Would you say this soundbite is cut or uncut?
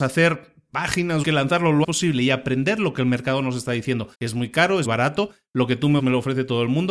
cut